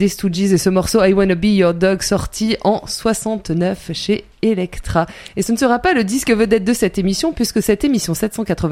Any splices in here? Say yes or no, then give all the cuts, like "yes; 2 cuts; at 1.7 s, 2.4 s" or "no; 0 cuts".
no; 0 cuts